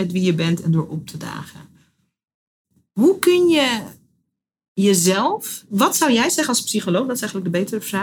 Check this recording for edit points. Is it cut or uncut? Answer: uncut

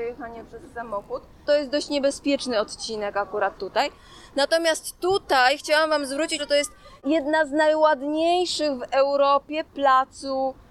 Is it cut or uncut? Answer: cut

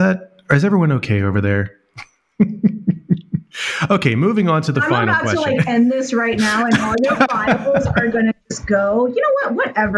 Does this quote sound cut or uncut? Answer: uncut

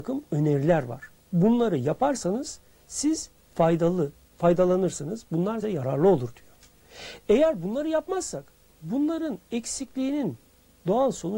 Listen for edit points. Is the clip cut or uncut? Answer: cut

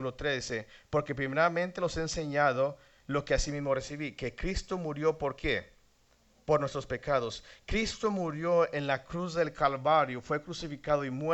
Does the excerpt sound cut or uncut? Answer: uncut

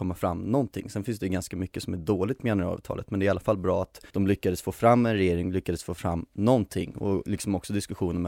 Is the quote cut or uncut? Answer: cut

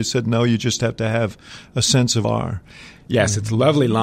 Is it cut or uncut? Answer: cut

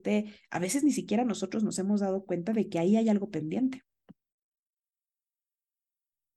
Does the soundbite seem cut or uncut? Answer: uncut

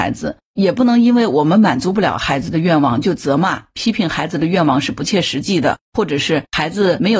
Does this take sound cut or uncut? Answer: cut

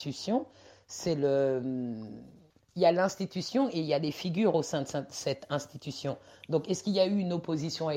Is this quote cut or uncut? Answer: uncut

